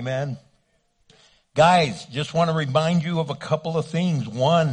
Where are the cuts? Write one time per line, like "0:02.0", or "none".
none